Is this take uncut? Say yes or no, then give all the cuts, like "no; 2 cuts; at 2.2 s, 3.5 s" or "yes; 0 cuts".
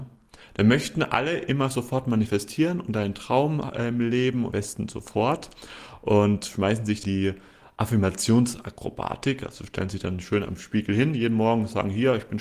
no; 2 cuts; at 4.5 s, 7.0 s